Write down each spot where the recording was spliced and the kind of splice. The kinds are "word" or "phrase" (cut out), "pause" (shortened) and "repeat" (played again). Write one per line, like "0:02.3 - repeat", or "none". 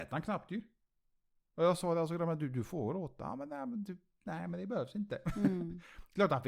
none